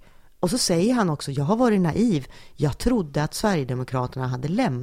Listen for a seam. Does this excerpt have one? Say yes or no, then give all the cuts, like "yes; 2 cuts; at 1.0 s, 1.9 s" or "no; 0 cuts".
no; 0 cuts